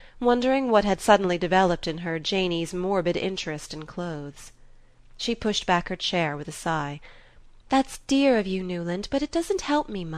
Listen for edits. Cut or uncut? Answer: uncut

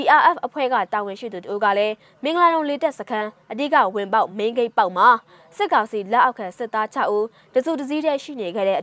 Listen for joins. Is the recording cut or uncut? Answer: uncut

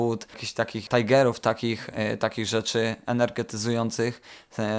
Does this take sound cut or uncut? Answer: uncut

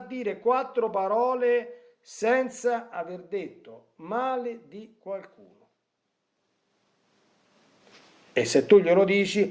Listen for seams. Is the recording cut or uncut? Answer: uncut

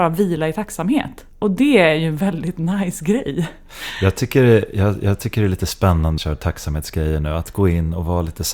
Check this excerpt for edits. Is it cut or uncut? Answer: cut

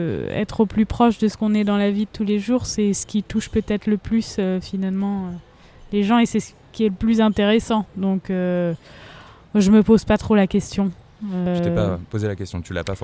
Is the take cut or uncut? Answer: uncut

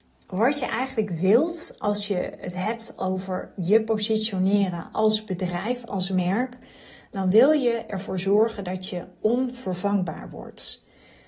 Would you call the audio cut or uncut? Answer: uncut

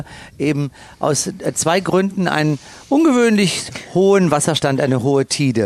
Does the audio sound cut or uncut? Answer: uncut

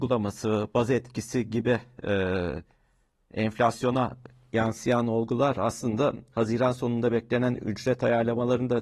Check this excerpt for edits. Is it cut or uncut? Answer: uncut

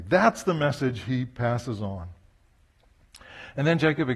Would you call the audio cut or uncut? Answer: uncut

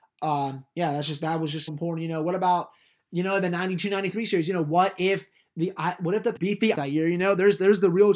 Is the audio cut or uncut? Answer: cut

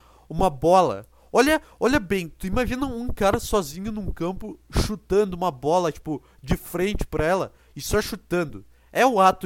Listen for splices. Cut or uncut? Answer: uncut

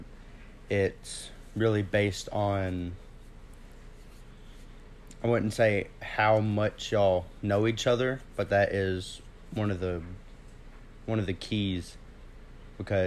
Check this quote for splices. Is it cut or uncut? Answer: uncut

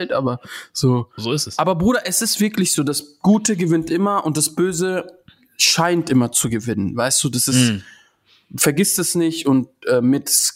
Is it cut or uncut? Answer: uncut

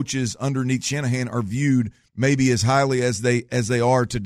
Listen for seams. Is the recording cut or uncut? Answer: cut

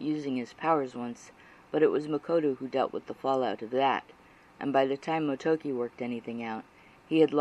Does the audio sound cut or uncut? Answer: uncut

